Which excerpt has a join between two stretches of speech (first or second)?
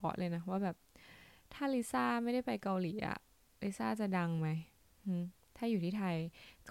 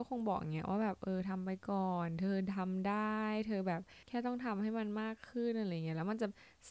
second